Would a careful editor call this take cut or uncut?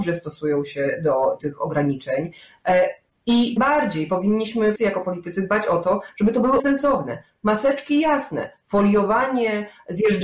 cut